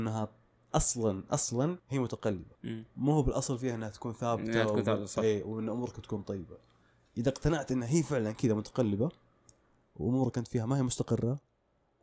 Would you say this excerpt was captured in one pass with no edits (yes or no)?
yes